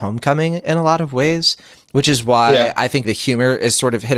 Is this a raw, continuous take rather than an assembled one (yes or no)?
no